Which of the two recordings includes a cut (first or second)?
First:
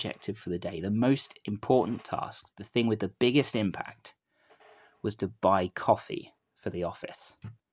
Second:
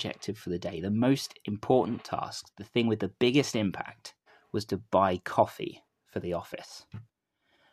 second